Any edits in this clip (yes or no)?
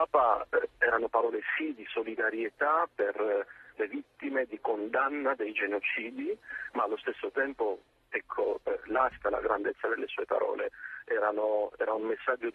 no